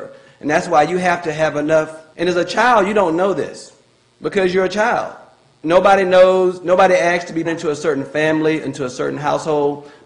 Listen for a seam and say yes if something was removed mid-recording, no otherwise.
yes